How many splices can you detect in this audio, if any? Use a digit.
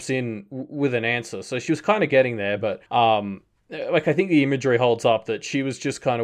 1